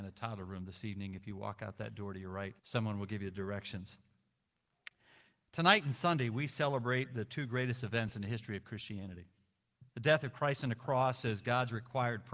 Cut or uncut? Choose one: cut